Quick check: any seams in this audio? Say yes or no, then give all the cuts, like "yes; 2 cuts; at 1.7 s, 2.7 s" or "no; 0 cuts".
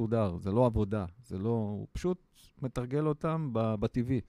no; 0 cuts